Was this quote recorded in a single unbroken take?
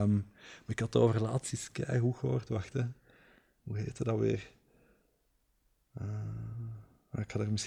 yes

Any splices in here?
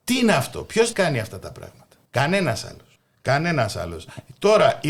yes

